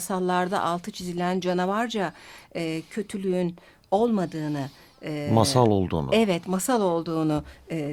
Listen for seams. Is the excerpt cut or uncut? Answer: uncut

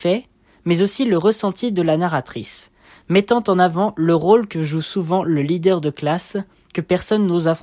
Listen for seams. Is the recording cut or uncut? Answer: uncut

